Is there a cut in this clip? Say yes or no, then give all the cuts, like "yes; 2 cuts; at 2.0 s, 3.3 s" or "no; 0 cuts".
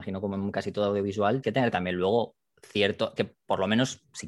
yes; 2 cuts; at 1.4 s, 3.2 s